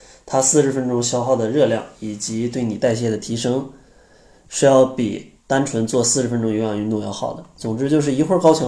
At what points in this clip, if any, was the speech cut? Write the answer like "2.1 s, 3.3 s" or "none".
5.4 s